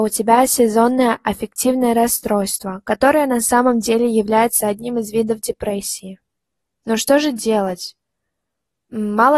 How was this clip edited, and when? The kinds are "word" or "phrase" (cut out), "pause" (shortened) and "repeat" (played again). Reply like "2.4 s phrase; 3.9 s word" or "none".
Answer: none